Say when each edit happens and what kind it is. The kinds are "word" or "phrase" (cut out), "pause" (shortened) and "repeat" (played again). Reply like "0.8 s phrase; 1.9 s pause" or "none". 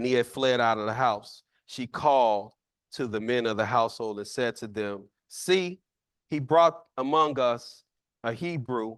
none